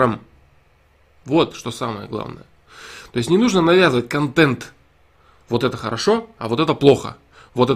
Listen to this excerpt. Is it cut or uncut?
uncut